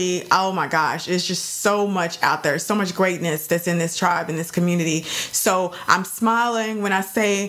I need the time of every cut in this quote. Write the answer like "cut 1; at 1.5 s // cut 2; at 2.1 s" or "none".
none